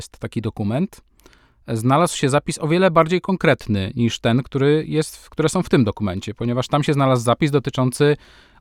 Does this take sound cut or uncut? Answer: uncut